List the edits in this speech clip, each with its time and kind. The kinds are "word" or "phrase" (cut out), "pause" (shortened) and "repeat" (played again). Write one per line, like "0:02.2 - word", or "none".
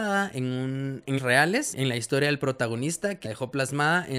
0:01.2 - word
0:01.7 - word
0:03.2 - word